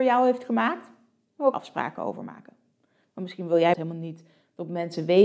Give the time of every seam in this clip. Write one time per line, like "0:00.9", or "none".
0:01.5
0:03.7